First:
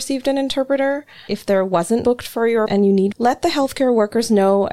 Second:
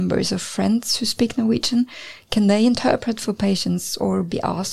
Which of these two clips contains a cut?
first; 4 cuts; at 1.3 s, 2.0 s, 2.7 s, 3.1 s

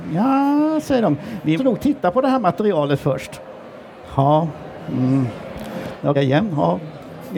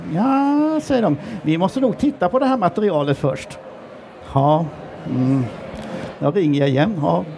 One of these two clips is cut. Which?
first; 2 cuts; at 1.6 s, 6.1 s

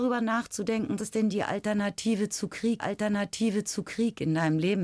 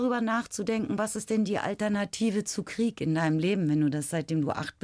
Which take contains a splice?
first; 2 cuts; at 1.0 s, 2.8 s

